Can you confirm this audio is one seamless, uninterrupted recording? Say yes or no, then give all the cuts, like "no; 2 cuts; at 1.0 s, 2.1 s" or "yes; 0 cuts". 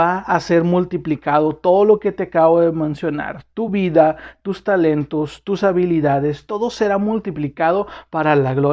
yes; 0 cuts